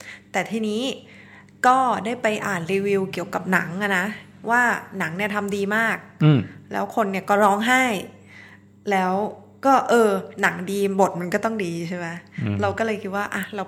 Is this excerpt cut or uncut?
uncut